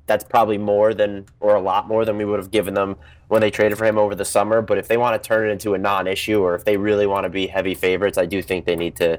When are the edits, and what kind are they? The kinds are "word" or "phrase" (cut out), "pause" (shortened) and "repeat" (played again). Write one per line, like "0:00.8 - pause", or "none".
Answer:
none